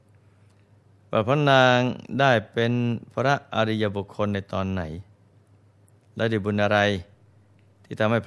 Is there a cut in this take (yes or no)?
no